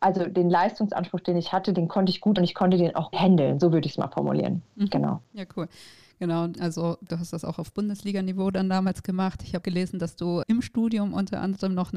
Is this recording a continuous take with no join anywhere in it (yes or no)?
no